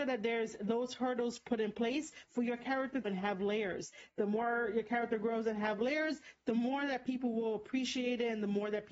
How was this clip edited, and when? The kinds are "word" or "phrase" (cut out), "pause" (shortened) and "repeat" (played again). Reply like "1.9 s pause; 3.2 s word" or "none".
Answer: 3.0 s word